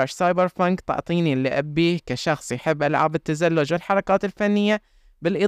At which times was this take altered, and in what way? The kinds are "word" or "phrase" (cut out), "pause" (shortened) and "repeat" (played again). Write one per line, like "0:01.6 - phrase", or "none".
none